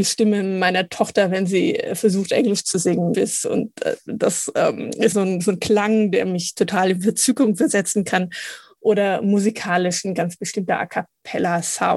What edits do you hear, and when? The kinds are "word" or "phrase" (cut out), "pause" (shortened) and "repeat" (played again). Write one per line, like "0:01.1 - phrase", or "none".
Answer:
0:03.1 - phrase
0:05.1 - word